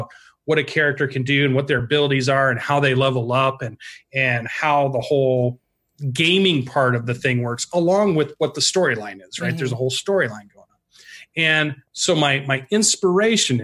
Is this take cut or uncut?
uncut